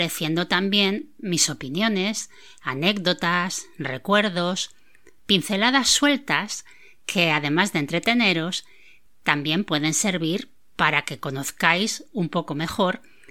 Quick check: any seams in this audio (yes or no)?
no